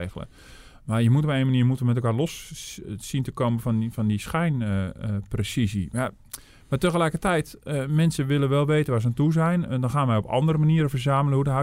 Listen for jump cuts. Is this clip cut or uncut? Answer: uncut